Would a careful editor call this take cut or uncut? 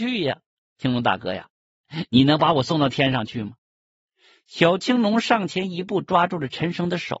cut